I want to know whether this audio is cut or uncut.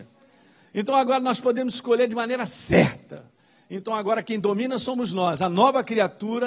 uncut